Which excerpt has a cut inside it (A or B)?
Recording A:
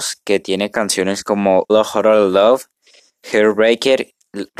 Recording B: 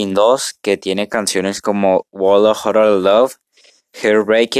A